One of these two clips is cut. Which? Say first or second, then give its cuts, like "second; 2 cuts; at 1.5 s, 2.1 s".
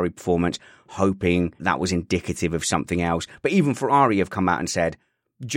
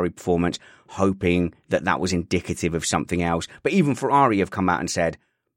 first; 1 cut; at 1.6 s